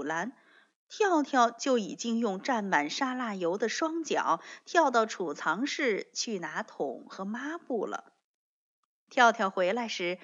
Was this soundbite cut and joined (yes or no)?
no